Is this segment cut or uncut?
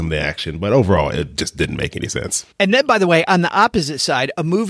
cut